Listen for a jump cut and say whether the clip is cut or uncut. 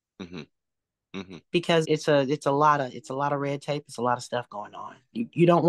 cut